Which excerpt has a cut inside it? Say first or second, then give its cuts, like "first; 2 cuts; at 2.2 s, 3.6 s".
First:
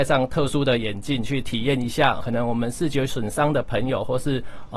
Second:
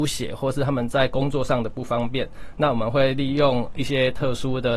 first; 1 cut; at 2.2 s